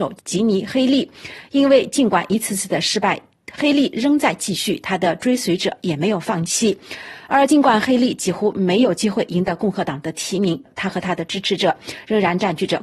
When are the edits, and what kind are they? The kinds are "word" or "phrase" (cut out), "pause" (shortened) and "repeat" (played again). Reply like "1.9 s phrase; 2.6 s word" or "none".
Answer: none